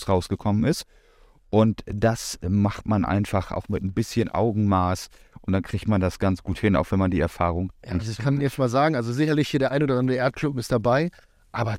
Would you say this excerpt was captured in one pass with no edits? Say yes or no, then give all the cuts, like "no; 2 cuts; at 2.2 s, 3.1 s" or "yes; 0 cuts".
yes; 0 cuts